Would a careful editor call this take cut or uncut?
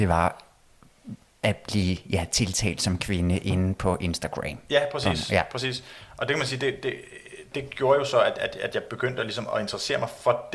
uncut